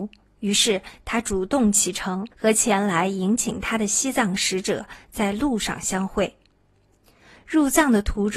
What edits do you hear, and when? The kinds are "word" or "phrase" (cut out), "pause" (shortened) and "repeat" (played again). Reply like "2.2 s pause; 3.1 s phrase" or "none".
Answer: 2.3 s pause